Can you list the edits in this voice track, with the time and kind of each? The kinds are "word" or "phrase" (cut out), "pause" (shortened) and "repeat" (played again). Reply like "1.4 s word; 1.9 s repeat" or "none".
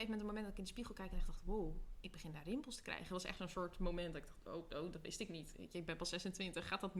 none